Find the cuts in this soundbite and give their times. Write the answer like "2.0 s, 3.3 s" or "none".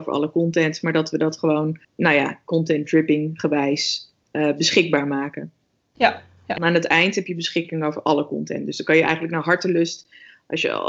1.8 s, 6.6 s